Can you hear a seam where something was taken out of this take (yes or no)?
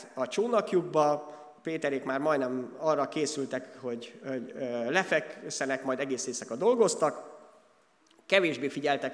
yes